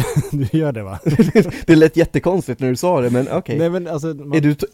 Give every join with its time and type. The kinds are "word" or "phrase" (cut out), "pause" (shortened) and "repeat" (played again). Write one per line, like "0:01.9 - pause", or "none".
none